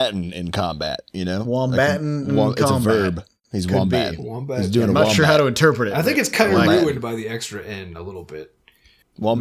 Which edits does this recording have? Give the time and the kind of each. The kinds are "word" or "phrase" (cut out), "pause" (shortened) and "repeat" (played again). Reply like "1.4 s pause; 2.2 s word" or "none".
none